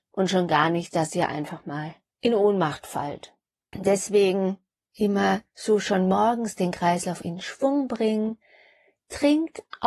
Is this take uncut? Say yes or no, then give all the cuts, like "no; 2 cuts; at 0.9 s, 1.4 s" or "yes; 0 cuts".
yes; 0 cuts